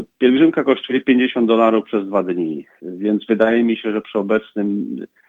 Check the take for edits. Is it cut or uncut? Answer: uncut